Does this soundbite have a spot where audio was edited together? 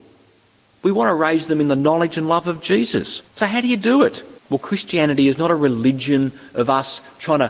yes; 2 cuts; at 3.3 s, 4.4 s

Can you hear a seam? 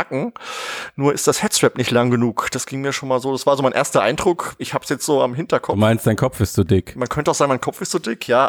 no; 0 cuts

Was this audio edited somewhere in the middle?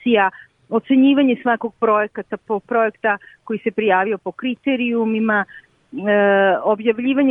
yes; 1 cut; at 2.4 s

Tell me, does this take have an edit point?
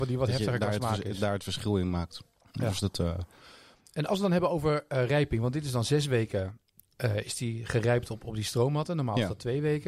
no; 0 cuts

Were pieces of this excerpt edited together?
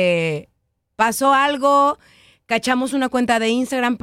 no; 0 cuts

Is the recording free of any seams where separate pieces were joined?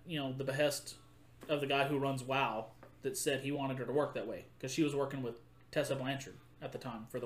yes; 0 cuts

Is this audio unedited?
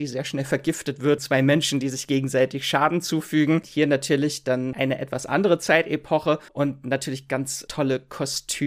no; 2 cuts; at 1.2 s, 6.5 s

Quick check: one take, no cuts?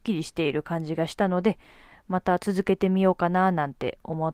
yes; 0 cuts

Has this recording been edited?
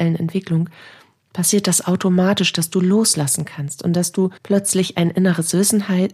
yes; 1 cut; at 4.4 s

